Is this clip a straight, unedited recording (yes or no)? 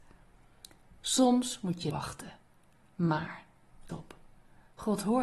no